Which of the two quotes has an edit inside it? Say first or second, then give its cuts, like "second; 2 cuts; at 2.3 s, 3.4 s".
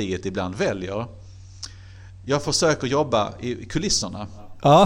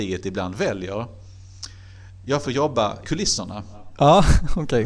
second; 2 cuts; at 2.4 s, 3.0 s